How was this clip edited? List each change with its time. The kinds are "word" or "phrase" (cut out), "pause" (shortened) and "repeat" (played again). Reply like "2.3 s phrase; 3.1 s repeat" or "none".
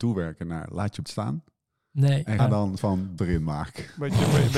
1.0 s word; 2.4 s word; 2.8 s word; 3.2 s word